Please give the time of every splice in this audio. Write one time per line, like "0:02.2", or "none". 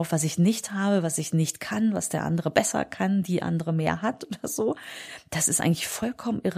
none